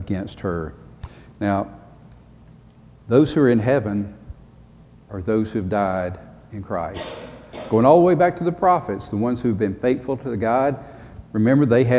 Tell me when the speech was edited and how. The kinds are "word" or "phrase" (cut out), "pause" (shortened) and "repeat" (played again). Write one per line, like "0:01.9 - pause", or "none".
none

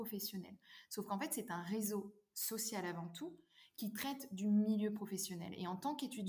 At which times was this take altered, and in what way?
none

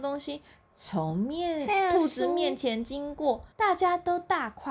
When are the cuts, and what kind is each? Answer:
0:03.5 - pause

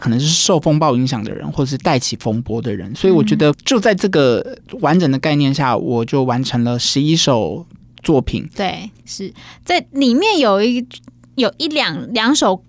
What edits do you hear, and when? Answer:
0:03.5 - word
0:08.9 - word

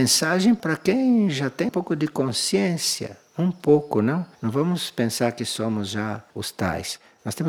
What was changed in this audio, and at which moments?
0:01.7 - word
0:04.3 - pause
0:06.3 - pause

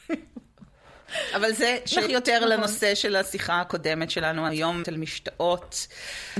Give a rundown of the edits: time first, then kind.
0:02.1 - word
0:04.5 - word
0:04.8 - word

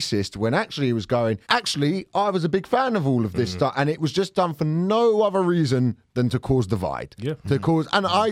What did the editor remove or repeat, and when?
0:01.4 - pause

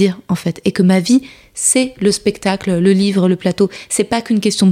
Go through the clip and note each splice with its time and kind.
none

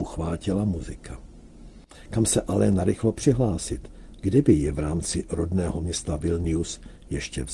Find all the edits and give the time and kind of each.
none

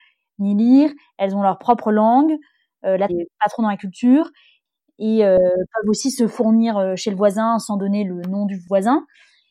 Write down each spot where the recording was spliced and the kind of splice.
0:03.1 - word

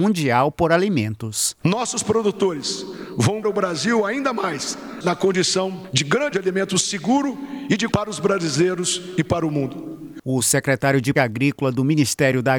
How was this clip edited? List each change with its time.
0:03.4 - word
0:06.3 - word
0:07.9 - word
0:11.2 - word

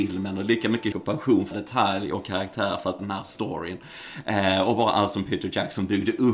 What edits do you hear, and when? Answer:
0:00.9 - word
0:01.5 - word
0:03.0 - word

